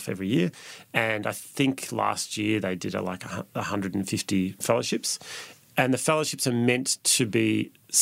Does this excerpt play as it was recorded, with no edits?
no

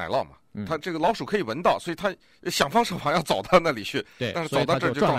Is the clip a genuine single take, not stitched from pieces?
yes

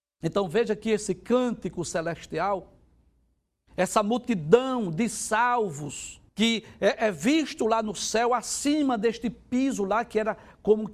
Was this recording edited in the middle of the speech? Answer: yes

